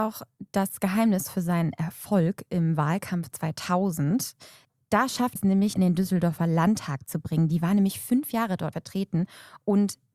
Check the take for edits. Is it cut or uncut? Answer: cut